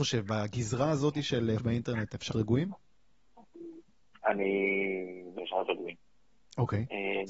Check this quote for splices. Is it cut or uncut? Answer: cut